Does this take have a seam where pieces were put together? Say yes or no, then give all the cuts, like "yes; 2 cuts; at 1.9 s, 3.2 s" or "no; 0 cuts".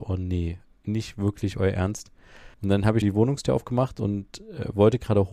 yes; 2 cuts; at 2.5 s, 3.0 s